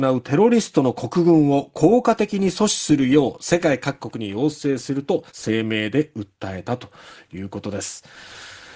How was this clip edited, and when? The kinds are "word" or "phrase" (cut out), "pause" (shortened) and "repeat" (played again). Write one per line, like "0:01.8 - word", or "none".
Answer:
0:05.3 - pause